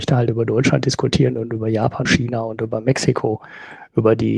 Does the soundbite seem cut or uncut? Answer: cut